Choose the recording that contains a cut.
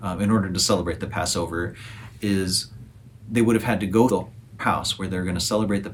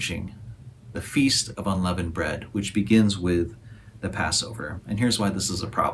first; 2 cuts; at 4.1 s, 4.6 s

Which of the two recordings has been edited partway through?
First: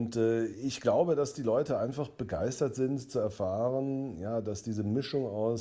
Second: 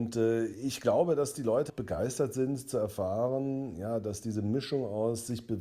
second; 1 cut; at 1.7 s

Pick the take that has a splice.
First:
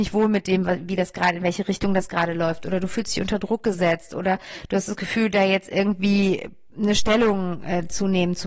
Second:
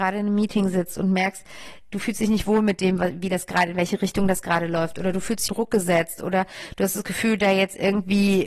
second; 1 cut; at 5.5 s

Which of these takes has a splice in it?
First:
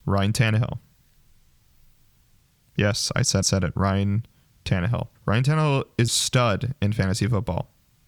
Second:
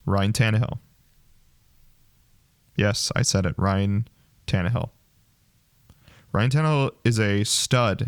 first; 3 cuts; at 3.4 s, 5.1 s, 6.1 s

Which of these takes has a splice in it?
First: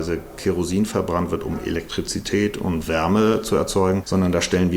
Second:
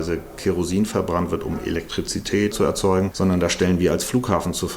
second; 1 cut; at 2.5 s

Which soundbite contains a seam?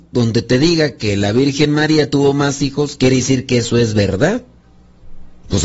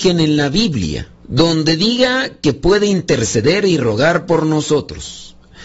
second; 1 cut; at 1.2 s

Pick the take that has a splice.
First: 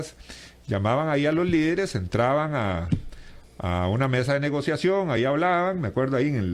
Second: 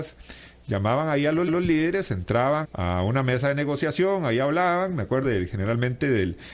second; 3 cuts; at 1.5 s, 2.6 s, 5.2 s

